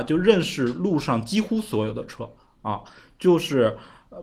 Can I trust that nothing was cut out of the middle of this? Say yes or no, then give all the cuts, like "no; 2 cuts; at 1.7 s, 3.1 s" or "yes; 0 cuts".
yes; 0 cuts